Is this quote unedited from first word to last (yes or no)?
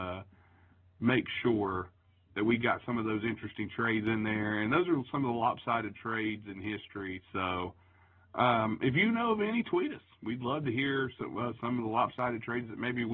yes